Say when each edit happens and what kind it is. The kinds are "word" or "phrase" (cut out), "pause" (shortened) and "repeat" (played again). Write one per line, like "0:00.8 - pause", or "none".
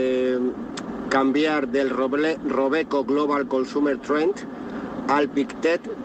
none